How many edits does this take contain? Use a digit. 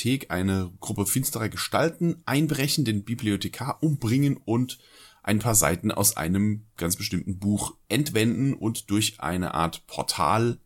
1